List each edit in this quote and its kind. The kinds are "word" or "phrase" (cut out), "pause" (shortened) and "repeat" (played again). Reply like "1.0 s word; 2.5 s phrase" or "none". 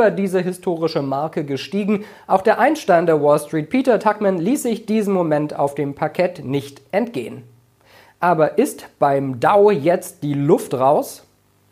none